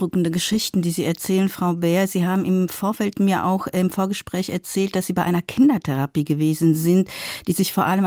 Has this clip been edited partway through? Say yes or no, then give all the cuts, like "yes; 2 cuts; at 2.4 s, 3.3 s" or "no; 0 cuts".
no; 0 cuts